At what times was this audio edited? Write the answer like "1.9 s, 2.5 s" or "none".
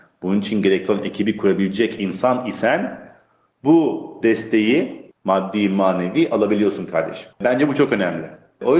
5.1 s, 7.3 s